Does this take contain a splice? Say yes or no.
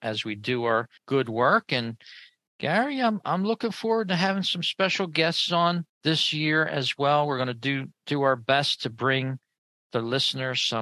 yes